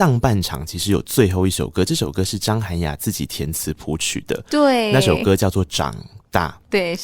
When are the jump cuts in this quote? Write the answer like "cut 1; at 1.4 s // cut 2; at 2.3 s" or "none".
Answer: none